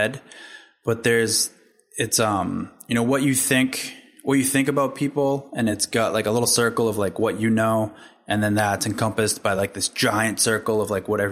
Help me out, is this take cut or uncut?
uncut